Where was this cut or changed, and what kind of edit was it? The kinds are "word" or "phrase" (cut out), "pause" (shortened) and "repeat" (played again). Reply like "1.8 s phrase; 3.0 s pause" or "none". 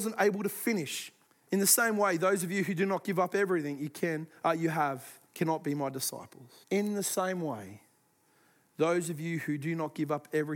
1.3 s pause; 5.3 s pause; 6.6 s pause